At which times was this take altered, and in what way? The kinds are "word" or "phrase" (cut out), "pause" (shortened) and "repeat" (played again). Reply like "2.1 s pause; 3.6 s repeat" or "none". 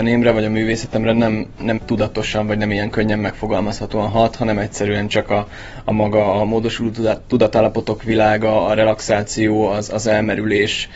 1.8 s word